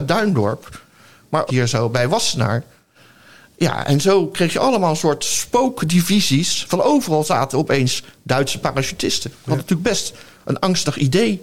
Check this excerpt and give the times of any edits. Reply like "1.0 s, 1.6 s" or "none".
1.5 s